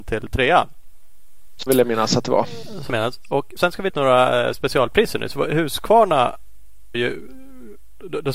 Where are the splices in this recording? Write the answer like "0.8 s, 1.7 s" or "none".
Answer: 1.7 s, 2.9 s, 3.6 s, 3.9 s, 6.9 s